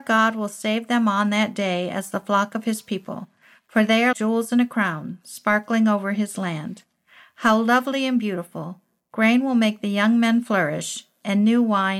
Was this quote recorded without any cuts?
no; 1 cut; at 4.1 s

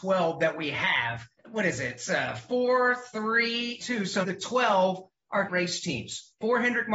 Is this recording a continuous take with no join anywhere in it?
no; 4 cuts; at 1.4 s, 3.8 s, 4.2 s, 5.5 s

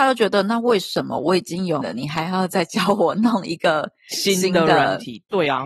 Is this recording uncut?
no; 1 cut; at 1.8 s

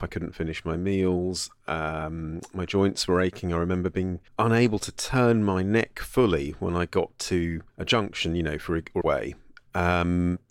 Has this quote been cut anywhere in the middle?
yes; 3 cuts; at 4.3 s, 7.7 s, 9.0 s

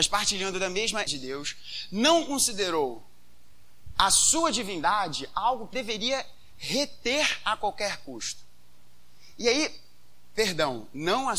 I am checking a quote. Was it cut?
yes; 2 cuts; at 1.1 s, 5.7 s

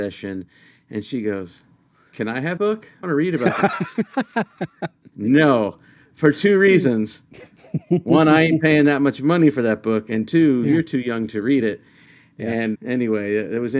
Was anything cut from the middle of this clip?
yes; 3 cuts; at 2.6 s, 3.0 s, 12.7 s

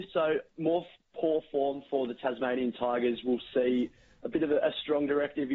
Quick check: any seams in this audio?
no; 0 cuts

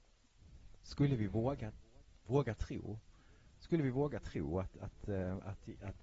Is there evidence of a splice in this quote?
no; 0 cuts

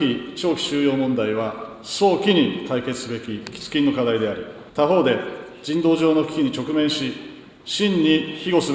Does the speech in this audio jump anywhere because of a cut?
yes; 1 cut; at 4.7 s

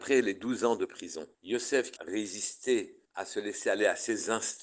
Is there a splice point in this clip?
yes; 3 cuts; at 1.3 s, 2.0 s, 3.0 s

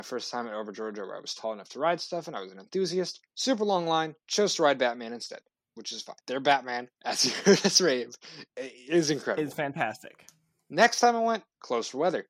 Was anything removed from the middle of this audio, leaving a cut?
yes; 6 cuts; at 3.3 s, 4.2 s, 5.5 s, 6.2 s, 7.0 s, 8.5 s

